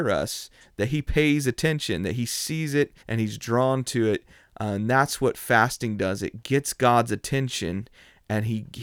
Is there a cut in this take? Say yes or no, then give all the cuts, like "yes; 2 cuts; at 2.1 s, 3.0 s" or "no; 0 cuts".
yes; 1 cut; at 3.0 s